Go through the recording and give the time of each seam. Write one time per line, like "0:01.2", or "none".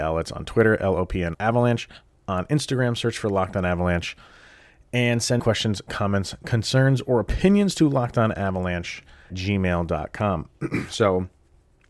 0:01.3
0:05.4
0:09.3